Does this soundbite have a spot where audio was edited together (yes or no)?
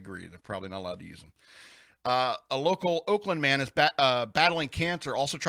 no